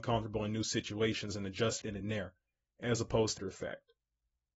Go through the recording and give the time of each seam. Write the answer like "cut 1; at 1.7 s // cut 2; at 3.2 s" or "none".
cut 1; at 1.8 s // cut 2; at 3.4 s